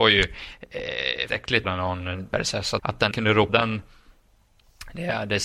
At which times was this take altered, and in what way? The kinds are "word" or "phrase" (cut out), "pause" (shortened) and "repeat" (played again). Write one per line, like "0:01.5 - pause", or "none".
0:01.3 - word
0:01.6 - word
0:02.3 - word
0:02.8 - word
0:03.1 - word
0:03.5 - word